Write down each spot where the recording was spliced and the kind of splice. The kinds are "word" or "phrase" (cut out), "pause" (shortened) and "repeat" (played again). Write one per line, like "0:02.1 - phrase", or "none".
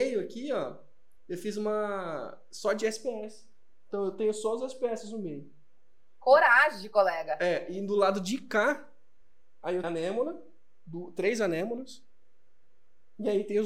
0:09.8 - word